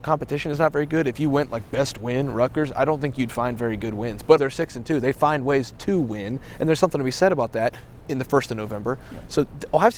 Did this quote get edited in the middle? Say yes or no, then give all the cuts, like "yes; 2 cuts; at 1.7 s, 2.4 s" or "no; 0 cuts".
yes; 1 cut; at 4.4 s